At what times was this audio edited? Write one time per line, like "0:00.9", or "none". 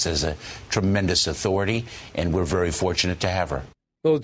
none